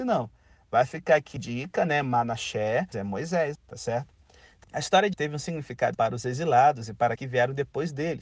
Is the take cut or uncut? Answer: cut